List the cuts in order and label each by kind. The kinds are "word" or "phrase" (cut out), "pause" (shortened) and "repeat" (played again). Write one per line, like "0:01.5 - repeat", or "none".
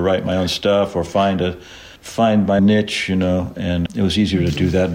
0:02.0 - pause
0:02.6 - word
0:03.9 - word